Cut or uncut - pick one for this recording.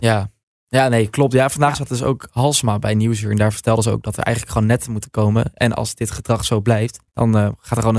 cut